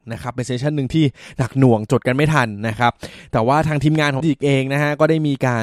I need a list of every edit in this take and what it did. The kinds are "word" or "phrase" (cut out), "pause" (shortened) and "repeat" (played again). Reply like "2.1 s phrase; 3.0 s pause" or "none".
4.2 s phrase